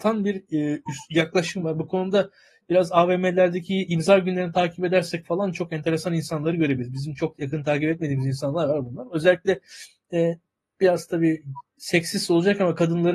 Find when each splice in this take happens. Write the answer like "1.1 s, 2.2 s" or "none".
none